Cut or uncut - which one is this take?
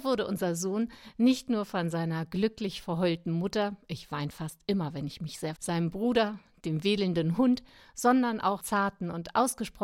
cut